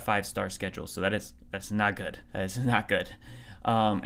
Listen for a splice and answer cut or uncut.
cut